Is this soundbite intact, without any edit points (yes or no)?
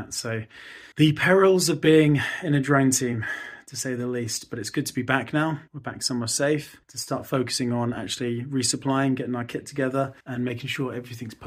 no